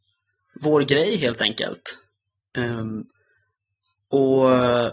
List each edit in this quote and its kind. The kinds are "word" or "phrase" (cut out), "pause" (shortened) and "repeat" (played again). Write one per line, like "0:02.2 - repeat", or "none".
none